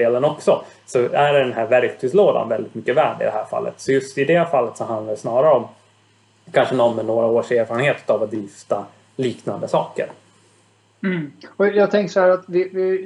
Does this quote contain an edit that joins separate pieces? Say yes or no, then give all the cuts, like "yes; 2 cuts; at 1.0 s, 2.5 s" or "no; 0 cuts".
no; 0 cuts